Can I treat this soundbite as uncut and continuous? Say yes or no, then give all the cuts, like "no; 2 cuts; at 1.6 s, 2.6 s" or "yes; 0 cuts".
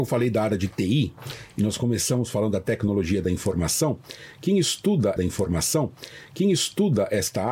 no; 1 cut; at 5.2 s